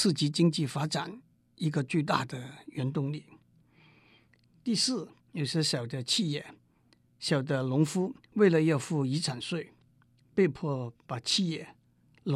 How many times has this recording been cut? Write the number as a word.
two